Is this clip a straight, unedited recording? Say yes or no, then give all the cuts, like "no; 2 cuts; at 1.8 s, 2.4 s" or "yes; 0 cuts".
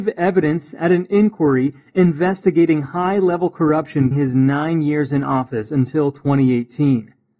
no; 1 cut; at 4.1 s